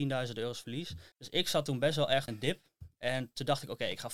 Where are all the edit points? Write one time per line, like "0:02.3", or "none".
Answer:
0:01.1
0:02.3